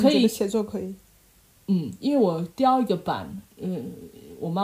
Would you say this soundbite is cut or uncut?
uncut